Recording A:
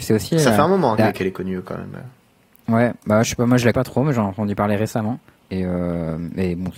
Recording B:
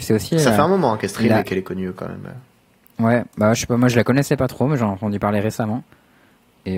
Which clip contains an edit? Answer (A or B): A